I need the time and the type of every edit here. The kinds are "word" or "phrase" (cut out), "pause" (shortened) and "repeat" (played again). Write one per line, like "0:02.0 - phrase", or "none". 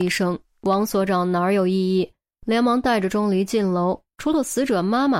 none